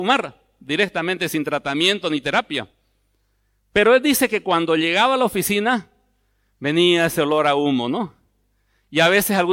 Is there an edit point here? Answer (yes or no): no